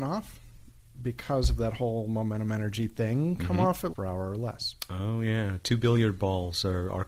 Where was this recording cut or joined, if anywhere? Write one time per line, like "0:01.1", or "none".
0:03.9